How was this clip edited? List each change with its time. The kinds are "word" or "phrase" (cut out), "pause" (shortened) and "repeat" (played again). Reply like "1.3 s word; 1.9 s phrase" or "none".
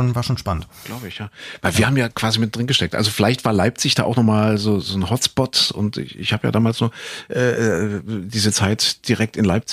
none